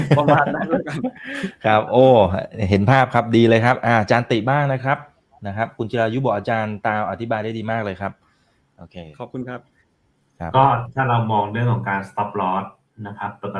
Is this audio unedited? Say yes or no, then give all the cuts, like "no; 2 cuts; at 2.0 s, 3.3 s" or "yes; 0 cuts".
yes; 0 cuts